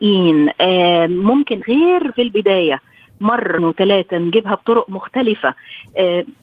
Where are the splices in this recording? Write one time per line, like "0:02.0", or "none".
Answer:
0:01.6
0:02.1
0:03.6